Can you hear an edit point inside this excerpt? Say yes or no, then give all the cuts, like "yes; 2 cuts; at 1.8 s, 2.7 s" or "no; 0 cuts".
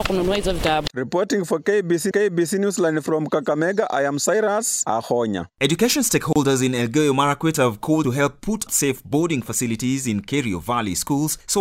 yes; 3 cuts; at 2.1 s, 8.0 s, 8.7 s